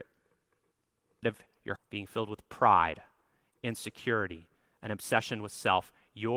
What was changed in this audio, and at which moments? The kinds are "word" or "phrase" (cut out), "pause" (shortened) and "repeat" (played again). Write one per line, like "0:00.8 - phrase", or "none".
0:01.2 - word
0:01.8 - word